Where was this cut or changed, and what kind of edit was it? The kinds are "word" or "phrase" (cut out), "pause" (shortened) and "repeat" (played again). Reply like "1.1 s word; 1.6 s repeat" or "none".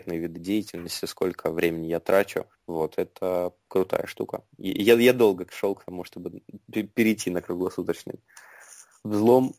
2.5 s pause; 4.5 s pause